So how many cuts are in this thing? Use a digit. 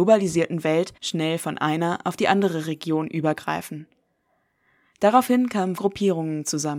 2